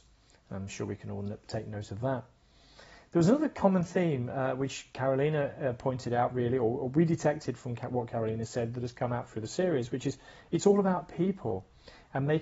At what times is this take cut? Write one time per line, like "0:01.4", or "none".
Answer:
none